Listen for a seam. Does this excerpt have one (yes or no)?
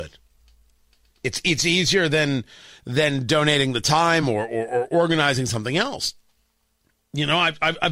no